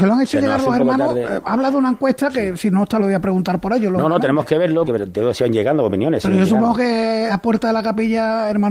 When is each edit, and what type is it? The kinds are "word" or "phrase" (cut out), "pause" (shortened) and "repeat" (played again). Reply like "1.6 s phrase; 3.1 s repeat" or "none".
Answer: 3.0 s phrase; 4.9 s word; 7.3 s word

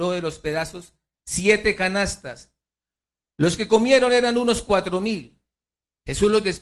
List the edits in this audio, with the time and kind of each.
none

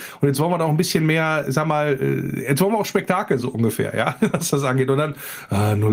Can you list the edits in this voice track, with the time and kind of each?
none

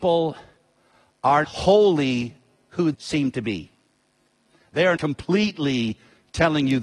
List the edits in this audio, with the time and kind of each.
1.4 s word; 2.9 s word; 5.0 s word

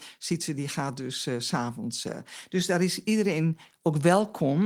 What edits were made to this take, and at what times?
none

